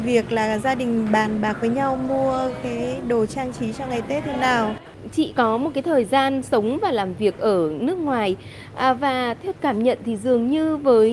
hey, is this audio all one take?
no; 1 cut; at 9.5 s

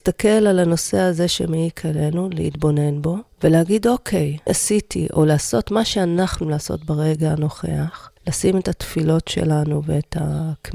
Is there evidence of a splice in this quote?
yes; 4 cuts; at 3.3 s, 4.5 s, 6.4 s, 8.2 s

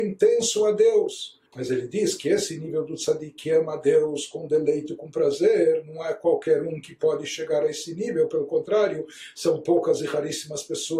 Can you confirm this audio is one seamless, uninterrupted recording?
no; 1 cut; at 1.5 s

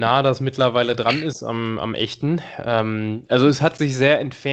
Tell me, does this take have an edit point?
no; 0 cuts

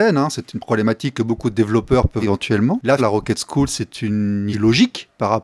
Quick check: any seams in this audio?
yes; 3 cuts; at 2.2 s, 3.0 s, 4.5 s

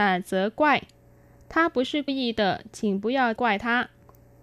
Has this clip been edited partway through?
yes; 2 cuts; at 2.1 s, 3.4 s

